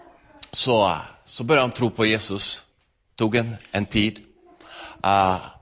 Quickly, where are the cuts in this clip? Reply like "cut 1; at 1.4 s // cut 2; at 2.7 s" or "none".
none